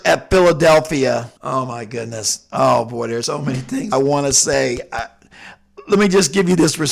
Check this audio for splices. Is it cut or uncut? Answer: cut